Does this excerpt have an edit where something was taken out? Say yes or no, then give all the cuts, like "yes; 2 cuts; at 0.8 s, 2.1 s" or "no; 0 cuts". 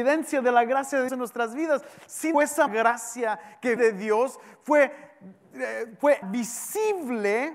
yes; 5 cuts; at 1.1 s, 2.3 s, 2.7 s, 3.8 s, 6.2 s